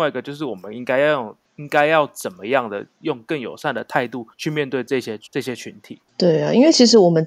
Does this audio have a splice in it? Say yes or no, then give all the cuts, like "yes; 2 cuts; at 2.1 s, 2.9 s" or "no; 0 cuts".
yes; 4 cuts; at 1.4 s, 4.3 s, 5.3 s, 6.1 s